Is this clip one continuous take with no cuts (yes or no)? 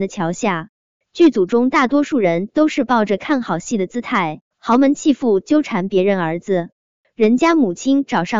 no